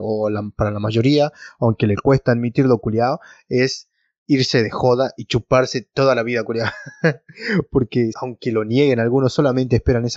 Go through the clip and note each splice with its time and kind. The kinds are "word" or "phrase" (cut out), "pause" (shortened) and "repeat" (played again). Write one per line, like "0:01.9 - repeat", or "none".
0:08.1 - word